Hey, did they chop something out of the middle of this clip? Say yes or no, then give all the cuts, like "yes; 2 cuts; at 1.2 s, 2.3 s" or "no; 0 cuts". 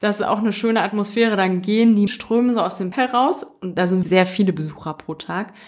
yes; 3 cuts; at 2.1 s, 2.9 s, 4.0 s